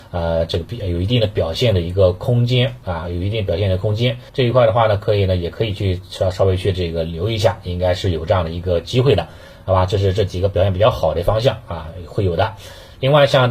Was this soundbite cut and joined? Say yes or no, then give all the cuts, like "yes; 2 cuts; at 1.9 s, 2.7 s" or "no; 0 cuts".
yes; 1 cut; at 4.3 s